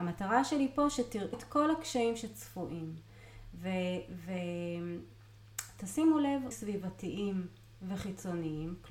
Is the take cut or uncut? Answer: cut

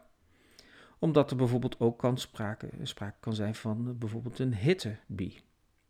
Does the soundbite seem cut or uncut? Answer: uncut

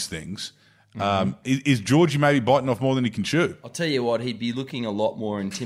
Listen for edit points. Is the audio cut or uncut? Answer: uncut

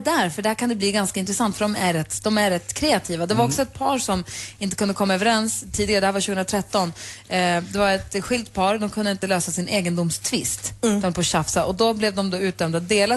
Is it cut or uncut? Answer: uncut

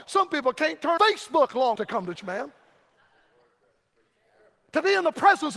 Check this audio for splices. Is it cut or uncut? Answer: cut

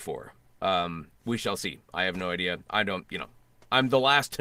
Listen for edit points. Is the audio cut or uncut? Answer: uncut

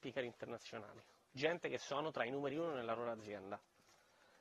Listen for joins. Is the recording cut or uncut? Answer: uncut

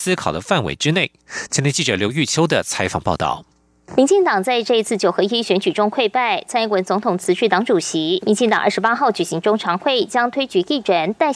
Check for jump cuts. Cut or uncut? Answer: uncut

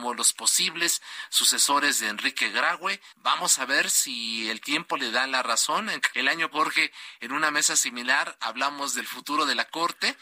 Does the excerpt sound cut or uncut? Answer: cut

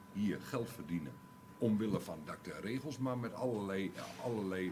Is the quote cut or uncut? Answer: uncut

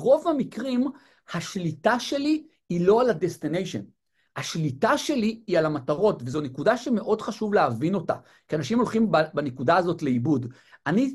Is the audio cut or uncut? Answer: uncut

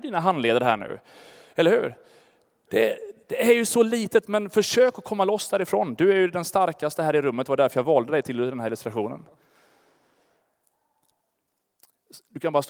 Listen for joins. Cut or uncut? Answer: uncut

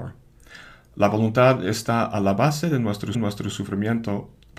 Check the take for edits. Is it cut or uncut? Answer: cut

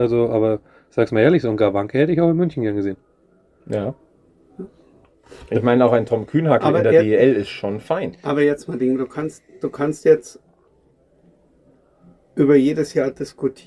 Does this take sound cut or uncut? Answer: uncut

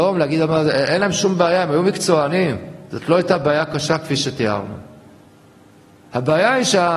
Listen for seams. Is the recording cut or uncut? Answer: uncut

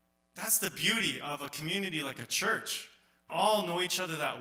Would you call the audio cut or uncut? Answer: cut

